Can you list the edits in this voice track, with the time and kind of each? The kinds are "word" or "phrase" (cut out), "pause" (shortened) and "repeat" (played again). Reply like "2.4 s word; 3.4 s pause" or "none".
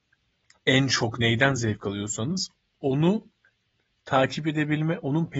none